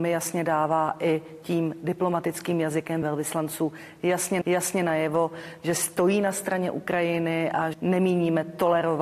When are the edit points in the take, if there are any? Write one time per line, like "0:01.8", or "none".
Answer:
0:03.0
0:04.4
0:07.7